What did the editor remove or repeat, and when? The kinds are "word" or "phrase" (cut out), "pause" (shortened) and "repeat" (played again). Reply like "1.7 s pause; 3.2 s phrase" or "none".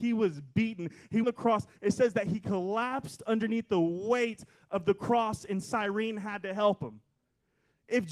1.2 s phrase; 5.6 s phrase